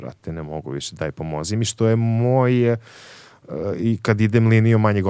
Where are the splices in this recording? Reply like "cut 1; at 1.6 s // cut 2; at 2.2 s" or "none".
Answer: none